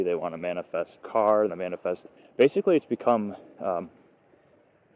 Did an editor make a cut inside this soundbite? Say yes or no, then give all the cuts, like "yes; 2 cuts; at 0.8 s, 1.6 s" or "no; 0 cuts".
yes; 4 cuts; at 1.0 s, 1.5 s, 2.2 s, 3.6 s